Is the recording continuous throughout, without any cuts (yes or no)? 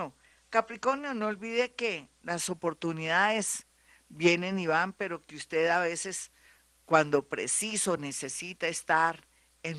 yes